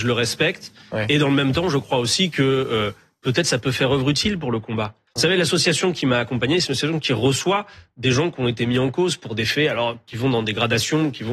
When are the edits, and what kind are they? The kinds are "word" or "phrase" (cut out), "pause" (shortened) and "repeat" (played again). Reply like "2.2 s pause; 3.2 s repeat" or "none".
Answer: none